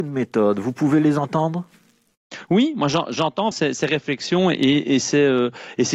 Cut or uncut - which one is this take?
cut